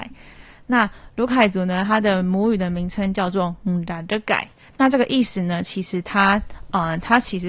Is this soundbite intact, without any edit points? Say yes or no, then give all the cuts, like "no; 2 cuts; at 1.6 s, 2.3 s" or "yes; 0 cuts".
yes; 0 cuts